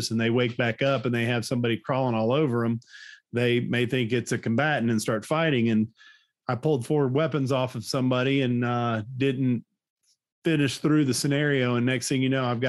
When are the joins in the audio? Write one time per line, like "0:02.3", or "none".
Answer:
none